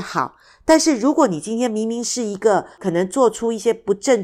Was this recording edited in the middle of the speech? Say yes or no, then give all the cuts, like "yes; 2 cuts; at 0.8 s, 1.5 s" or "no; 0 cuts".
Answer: yes; 1 cut; at 2.7 s